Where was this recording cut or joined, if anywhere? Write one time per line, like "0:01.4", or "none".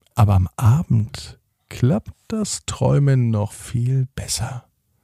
0:01.5
0:03.5